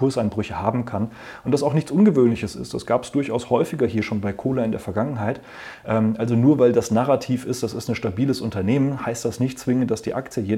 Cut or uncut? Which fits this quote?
uncut